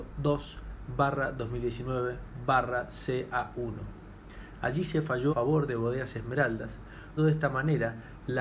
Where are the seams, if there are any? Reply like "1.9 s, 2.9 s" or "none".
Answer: 5.3 s, 7.2 s